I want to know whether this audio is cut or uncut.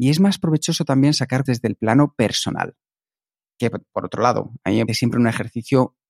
cut